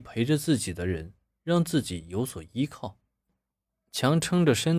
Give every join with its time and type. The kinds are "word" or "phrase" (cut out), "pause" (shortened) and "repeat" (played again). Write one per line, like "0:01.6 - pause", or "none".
none